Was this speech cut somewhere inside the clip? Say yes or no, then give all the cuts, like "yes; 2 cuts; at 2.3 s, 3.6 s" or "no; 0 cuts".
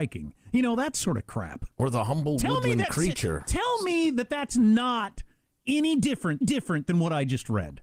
yes; 2 cuts; at 1.7 s, 6.4 s